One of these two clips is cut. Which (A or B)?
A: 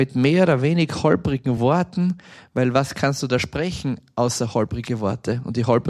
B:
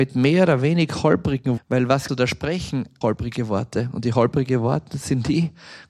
B